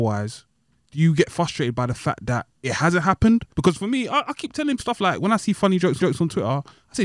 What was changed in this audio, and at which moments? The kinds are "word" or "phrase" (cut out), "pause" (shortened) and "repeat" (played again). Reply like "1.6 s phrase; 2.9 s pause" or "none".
2.5 s pause; 3.5 s pause; 4.8 s word; 6.0 s repeat